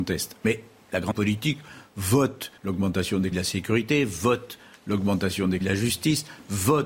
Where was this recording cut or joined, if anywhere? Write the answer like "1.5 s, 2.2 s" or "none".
1.1 s, 2.6 s, 3.3 s, 5.6 s

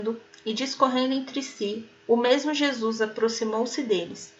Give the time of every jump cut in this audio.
none

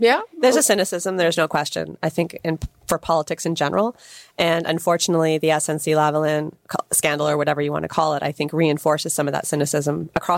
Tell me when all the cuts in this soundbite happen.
none

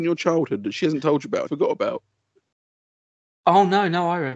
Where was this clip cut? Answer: 1.5 s

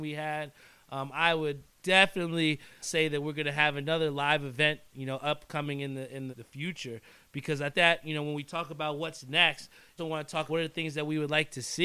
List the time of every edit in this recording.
2.8 s, 6.3 s, 7.7 s, 10.0 s, 10.5 s

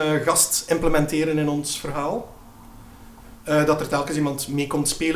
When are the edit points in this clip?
3.4 s

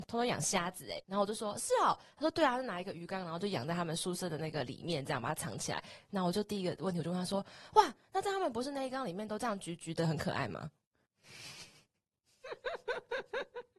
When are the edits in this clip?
1.0 s

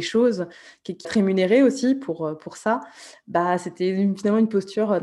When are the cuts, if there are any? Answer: 1.0 s

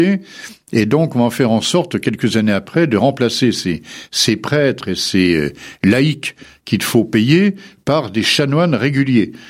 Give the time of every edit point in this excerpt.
none

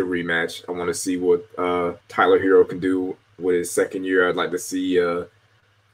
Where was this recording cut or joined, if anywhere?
2.0 s

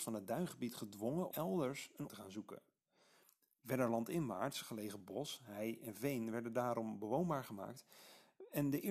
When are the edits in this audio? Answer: 1.3 s, 2.1 s

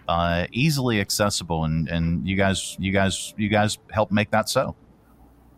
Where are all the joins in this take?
2.8 s

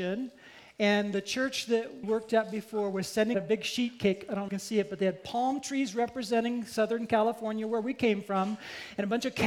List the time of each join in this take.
2.0 s, 3.3 s, 4.5 s

